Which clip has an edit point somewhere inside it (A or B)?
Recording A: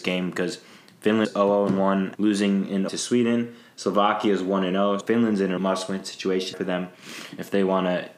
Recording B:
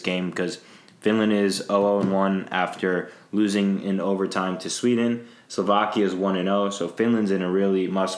A